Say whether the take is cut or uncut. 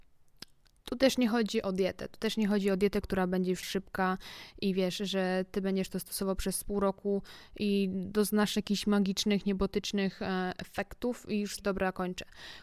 cut